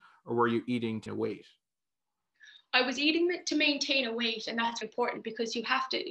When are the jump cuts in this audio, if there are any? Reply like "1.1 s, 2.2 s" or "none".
1.1 s, 4.8 s